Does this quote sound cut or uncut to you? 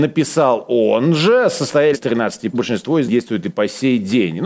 cut